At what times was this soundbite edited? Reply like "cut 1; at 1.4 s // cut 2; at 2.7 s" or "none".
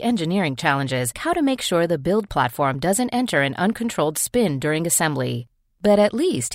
cut 1; at 1.1 s